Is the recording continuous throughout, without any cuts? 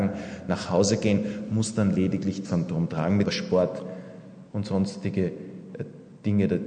no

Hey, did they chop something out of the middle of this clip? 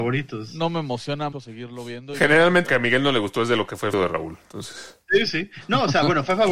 yes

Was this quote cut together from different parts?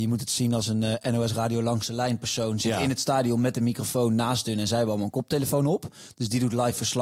no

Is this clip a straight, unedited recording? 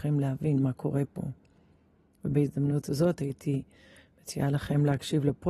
yes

